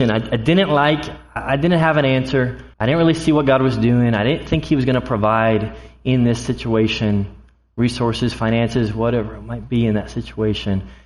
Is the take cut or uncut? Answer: cut